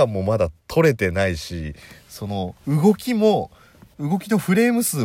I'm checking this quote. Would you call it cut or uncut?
cut